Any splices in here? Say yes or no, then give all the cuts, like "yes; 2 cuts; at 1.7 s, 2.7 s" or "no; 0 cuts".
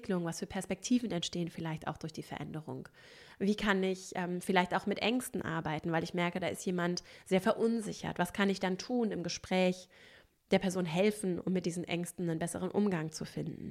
no; 0 cuts